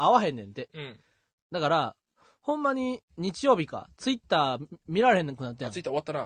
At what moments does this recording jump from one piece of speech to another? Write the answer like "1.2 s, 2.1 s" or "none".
none